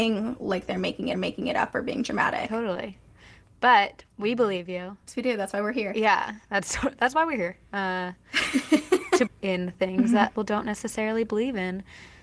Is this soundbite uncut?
no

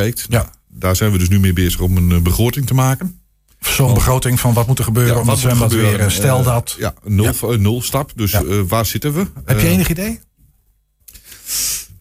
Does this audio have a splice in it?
no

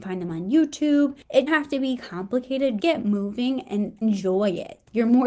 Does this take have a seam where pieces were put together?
yes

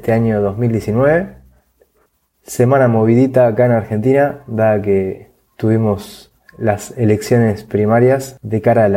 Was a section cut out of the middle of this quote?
no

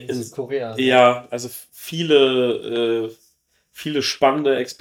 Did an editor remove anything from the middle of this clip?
no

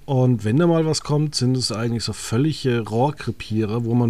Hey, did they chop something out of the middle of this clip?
no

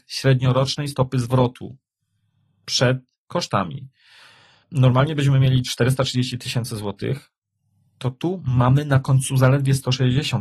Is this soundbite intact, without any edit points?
yes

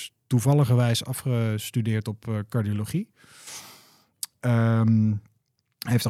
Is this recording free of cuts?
yes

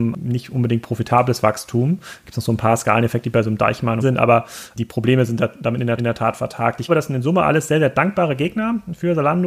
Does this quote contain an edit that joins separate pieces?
yes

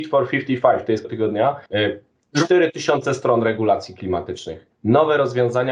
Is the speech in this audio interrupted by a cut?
yes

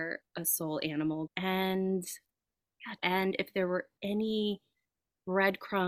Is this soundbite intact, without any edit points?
no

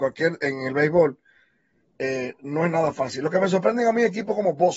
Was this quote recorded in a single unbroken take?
yes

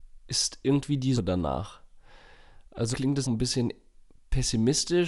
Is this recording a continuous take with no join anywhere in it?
no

